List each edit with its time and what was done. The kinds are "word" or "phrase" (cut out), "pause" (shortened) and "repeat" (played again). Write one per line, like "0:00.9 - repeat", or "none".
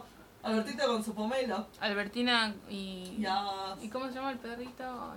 0:01.7 - pause